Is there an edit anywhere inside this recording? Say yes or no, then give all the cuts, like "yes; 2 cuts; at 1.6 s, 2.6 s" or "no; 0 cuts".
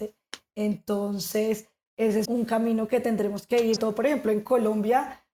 yes; 3 cuts; at 1.9 s, 2.2 s, 3.8 s